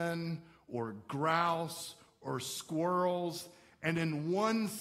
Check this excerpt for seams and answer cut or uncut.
uncut